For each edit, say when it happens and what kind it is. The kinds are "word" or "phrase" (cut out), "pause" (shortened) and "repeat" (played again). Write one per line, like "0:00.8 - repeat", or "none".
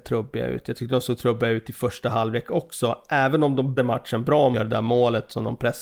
0:03.8 - word
0:04.5 - word

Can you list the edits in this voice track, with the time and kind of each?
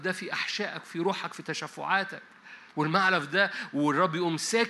0:02.7 - pause

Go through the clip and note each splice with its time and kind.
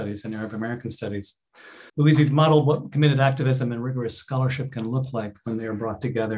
0:01.9 - pause

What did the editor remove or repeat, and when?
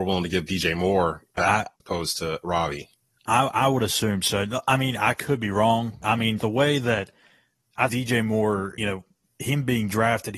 0:01.4 - word
0:01.8 - word
0:06.0 - word
0:06.4 - word
0:07.9 - word
0:08.8 - word

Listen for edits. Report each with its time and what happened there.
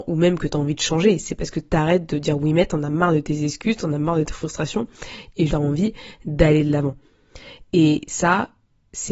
0:05.5 - word

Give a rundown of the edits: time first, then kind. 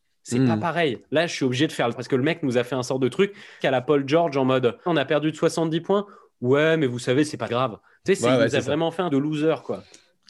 0:01.9 - word
0:03.6 - word
0:04.9 - word
0:07.5 - word
0:09.1 - word

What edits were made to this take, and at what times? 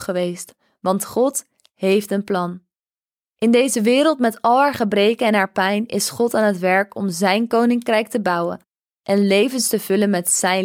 none

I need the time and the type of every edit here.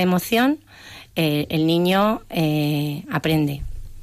none

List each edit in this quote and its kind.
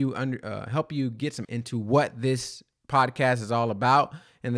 0:01.4 - word

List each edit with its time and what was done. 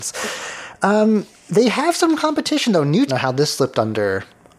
0:03.1 - phrase

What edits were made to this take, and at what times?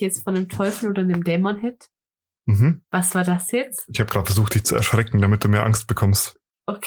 0:02.8 - pause

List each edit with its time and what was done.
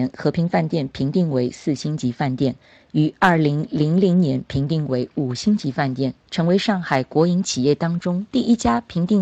none

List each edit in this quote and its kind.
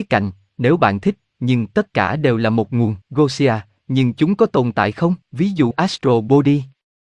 0:03.0 - pause
0:05.2 - pause
0:05.7 - word

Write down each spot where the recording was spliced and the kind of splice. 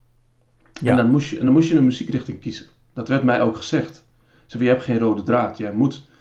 none

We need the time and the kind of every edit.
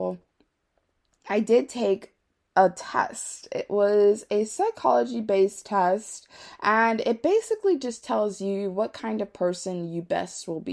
none

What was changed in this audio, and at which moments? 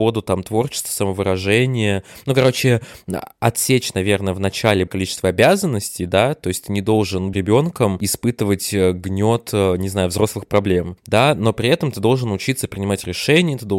0:04.9 - word
0:07.3 - word

